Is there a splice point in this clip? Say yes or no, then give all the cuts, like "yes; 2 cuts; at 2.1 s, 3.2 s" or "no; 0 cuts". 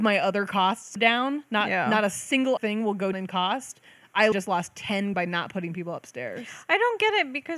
yes; 5 cuts; at 1.0 s, 2.6 s, 3.1 s, 4.3 s, 5.1 s